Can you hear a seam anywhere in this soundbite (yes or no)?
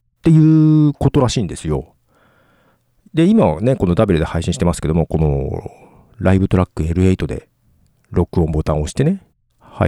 no